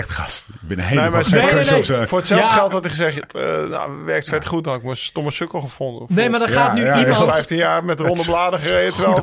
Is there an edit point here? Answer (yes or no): no